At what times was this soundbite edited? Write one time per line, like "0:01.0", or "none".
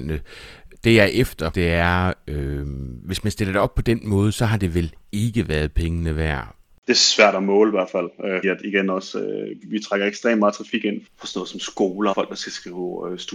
0:01.5
0:08.4
0:09.6
0:11.1
0:12.1